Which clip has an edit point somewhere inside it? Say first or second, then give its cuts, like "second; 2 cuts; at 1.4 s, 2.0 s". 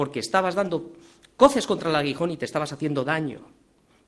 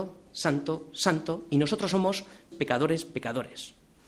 second; 1 cut; at 2.5 s